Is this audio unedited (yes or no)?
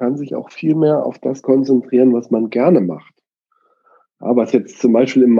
yes